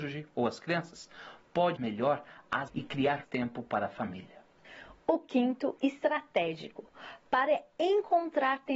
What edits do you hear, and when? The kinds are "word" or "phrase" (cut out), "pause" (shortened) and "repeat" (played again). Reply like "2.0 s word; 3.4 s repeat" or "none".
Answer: 1.8 s word; 2.7 s word; 3.2 s word; 5.8 s phrase

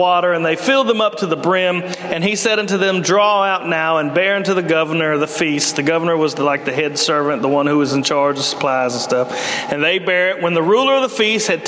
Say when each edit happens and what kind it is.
none

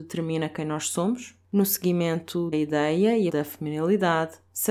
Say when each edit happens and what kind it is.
2.5 s word; 3.3 s phrase

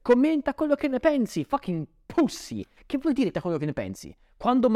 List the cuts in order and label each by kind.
3.3 s word

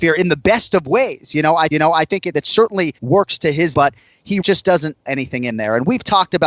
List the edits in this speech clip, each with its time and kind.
1.7 s repeat; 2.3 s word; 3.0 s pause; 3.7 s word; 4.4 s word; 5.1 s word

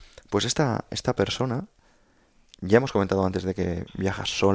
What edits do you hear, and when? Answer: none

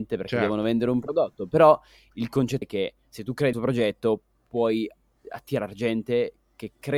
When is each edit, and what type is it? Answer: 2.6 s word; 3.5 s word

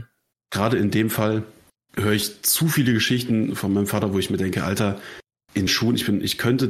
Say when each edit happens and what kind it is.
1.7 s pause; 5.7 s word

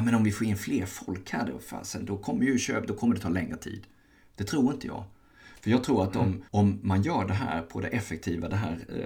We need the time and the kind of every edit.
6.5 s pause

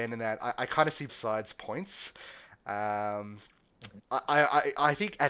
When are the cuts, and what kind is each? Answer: 1.1 s word; 4.0 s pause

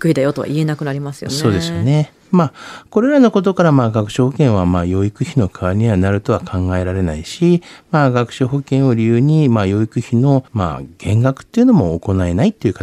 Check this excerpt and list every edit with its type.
10.5 s pause

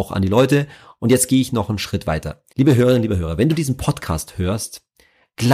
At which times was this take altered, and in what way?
2.5 s pause

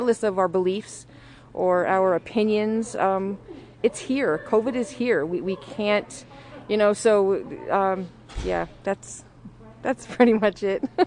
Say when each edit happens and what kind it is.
none

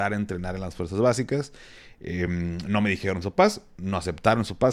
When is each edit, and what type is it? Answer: none

